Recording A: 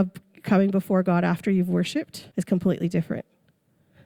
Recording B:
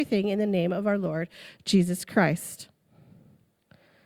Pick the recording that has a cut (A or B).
A